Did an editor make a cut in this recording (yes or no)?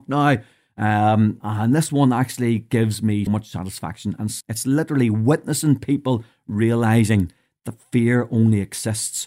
yes